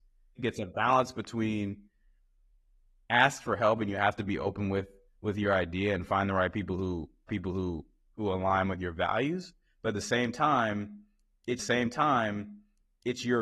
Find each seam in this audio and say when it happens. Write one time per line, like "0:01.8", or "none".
0:07.3
0:11.6